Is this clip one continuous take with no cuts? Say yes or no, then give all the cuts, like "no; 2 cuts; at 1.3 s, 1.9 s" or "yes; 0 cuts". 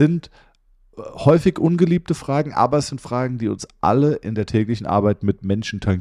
yes; 0 cuts